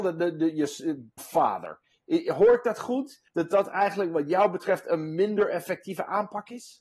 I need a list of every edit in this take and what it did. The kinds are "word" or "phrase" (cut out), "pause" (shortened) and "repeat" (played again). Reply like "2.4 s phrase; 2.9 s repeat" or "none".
1.2 s phrase; 3.3 s pause